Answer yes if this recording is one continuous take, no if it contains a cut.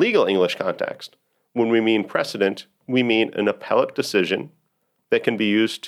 no